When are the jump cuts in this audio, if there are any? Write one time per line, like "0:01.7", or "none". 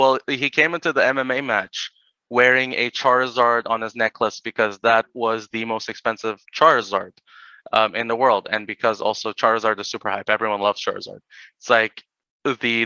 0:06.4